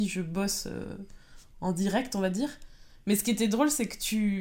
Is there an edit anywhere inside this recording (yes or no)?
no